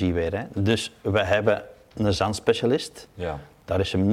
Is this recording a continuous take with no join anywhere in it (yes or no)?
yes